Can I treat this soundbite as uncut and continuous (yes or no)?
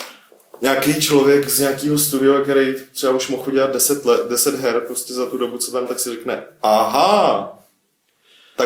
no